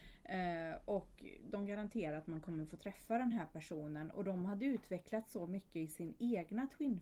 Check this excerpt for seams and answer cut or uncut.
uncut